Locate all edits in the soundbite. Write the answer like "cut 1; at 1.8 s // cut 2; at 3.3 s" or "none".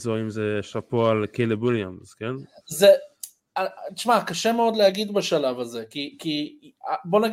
none